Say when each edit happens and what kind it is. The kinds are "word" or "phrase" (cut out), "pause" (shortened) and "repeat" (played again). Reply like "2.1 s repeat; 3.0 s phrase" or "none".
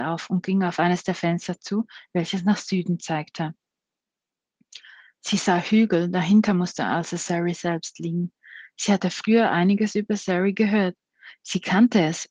none